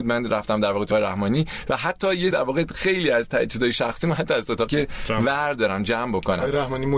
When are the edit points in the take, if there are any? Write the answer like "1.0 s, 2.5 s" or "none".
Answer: 0.9 s, 2.3 s, 4.7 s